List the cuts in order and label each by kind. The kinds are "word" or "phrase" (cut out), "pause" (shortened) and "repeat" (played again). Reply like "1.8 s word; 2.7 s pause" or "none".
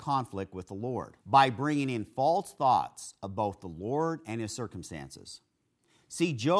1.2 s pause